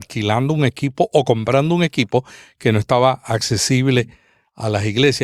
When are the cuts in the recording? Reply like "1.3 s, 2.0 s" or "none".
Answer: none